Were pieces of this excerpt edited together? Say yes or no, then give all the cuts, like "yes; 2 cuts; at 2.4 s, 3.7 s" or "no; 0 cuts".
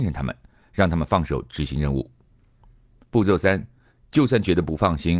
no; 0 cuts